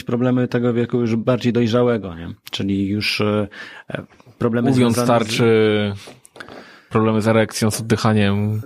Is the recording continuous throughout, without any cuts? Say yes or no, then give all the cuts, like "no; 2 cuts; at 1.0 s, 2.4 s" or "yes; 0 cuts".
yes; 0 cuts